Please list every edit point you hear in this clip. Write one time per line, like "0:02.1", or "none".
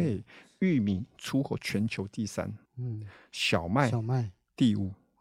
0:02.6